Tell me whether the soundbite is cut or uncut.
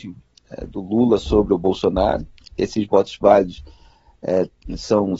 uncut